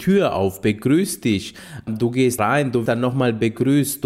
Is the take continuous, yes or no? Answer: no